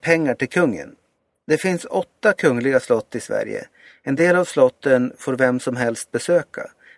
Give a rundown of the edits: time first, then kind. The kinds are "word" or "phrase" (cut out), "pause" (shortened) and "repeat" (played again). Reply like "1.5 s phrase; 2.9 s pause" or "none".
none